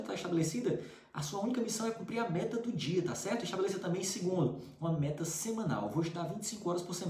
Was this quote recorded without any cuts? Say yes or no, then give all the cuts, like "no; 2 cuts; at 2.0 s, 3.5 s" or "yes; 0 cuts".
yes; 0 cuts